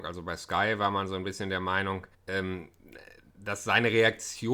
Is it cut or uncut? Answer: cut